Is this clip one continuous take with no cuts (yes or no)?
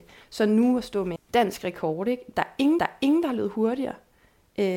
no